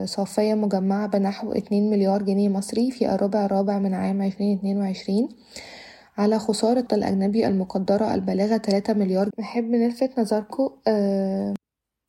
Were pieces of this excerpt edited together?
yes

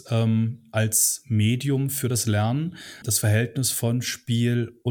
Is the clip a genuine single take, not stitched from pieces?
no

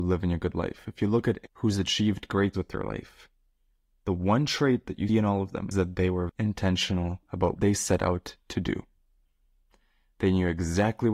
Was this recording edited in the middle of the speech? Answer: yes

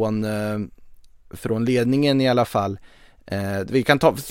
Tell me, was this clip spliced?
no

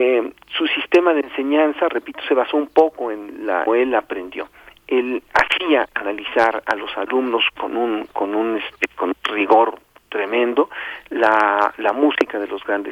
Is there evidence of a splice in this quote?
yes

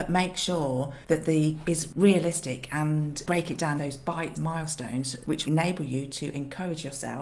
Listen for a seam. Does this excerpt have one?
yes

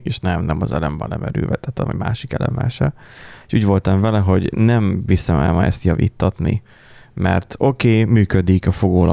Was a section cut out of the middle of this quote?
no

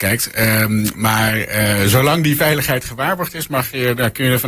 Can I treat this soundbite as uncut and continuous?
yes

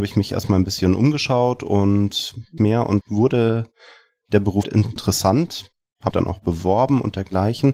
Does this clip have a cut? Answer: yes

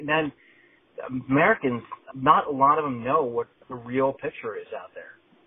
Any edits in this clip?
yes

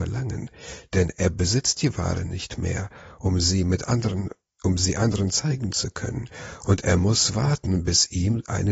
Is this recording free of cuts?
yes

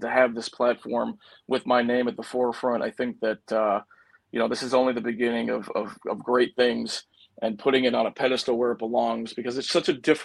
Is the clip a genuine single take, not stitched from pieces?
yes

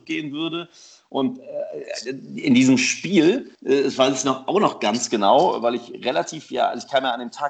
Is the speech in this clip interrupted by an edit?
yes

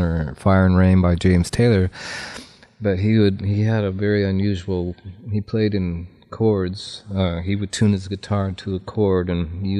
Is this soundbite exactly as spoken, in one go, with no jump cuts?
yes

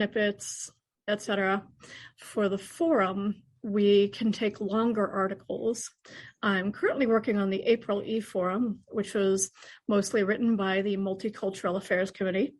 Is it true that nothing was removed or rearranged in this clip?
yes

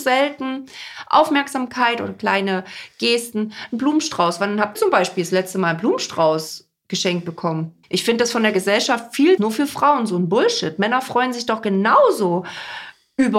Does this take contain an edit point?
yes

